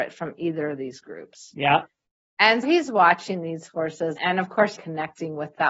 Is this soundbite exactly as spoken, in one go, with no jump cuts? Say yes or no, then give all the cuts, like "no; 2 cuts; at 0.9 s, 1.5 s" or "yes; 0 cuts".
no; 3 cuts; at 2.6 s, 4.2 s, 4.8 s